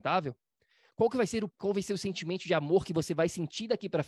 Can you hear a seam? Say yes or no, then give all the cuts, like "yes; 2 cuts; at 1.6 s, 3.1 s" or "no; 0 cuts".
yes; 1 cut; at 1.5 s